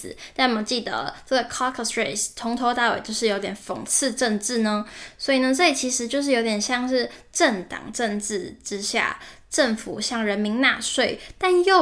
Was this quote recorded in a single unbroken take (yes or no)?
yes